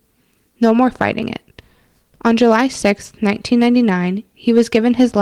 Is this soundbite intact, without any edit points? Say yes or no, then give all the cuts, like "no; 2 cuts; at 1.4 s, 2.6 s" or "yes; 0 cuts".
yes; 0 cuts